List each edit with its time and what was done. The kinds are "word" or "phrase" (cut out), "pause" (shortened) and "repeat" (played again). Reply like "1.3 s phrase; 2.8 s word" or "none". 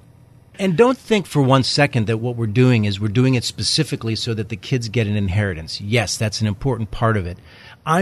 none